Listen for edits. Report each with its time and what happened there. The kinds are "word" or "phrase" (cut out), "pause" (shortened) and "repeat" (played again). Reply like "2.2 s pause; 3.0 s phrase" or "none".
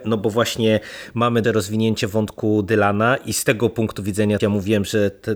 1.4 s word; 4.4 s word